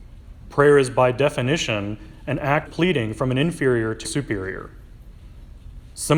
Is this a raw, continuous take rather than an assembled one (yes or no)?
no